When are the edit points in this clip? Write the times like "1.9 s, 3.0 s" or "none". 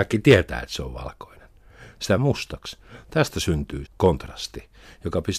2.2 s, 3.8 s